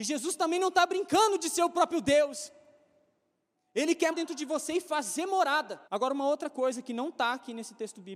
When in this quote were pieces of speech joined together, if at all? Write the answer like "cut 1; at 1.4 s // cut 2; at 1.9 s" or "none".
cut 1; at 4.1 s // cut 2; at 5.9 s